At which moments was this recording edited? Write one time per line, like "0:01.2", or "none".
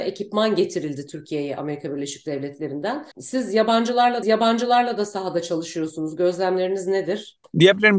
0:03.1
0:04.2